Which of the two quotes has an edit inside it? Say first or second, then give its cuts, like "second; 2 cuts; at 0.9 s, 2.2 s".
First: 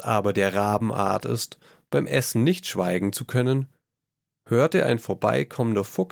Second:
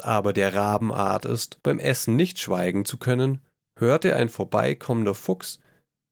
second; 2 cuts; at 1.6 s, 3.6 s